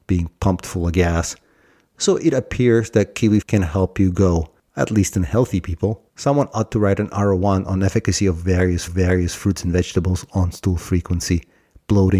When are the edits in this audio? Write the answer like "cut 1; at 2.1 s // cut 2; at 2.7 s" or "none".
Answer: cut 1; at 3.4 s // cut 2; at 6.1 s // cut 3; at 8.9 s